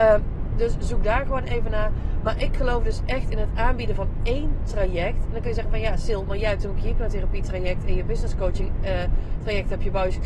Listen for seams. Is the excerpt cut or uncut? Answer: uncut